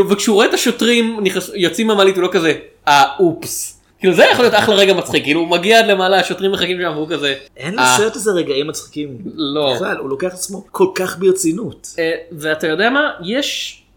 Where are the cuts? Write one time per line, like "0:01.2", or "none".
0:03.9
0:07.5
0:10.7

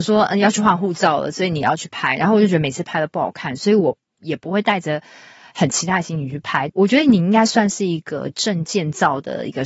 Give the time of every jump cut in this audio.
none

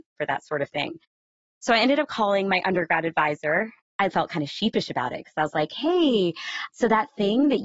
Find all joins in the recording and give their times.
none

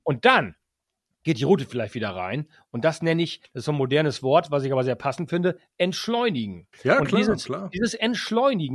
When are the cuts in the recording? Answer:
0:06.7

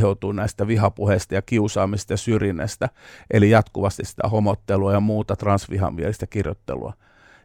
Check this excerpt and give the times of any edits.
none

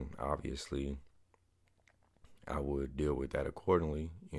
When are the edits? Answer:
none

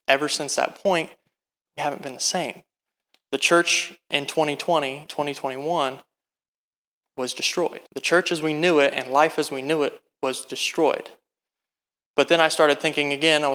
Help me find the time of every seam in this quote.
0:01.8
0:05.1
0:07.9

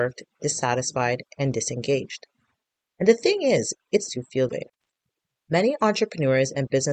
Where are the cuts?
0:04.1
0:04.5

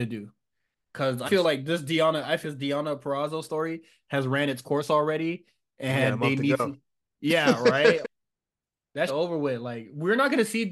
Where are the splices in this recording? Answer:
0:01.3
0:02.4
0:08.0
0:09.1

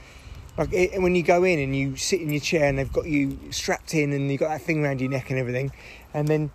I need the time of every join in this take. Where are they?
0:03.5

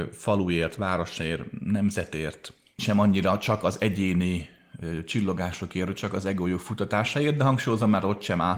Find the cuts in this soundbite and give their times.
0:02.8

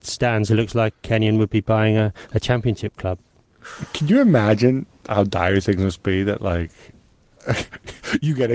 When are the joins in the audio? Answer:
none

